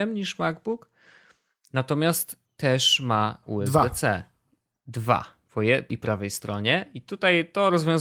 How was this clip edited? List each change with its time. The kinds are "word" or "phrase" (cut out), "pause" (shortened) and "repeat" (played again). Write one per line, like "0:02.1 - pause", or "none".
0:02.4 - word
0:03.4 - word
0:05.9 - word